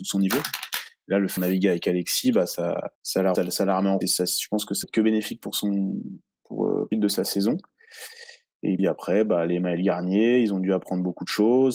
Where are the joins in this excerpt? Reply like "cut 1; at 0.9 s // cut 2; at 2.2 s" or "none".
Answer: cut 1; at 1.4 s // cut 2; at 2.9 s // cut 3; at 3.3 s // cut 4; at 4.0 s // cut 5; at 4.8 s // cut 6; at 6.9 s // cut 7; at 8.8 s